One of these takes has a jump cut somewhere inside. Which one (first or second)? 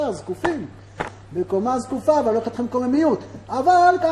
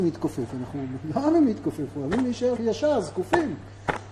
second